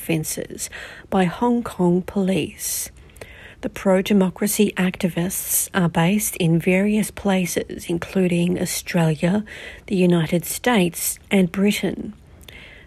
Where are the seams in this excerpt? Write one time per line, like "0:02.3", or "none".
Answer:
0:03.5
0:11.2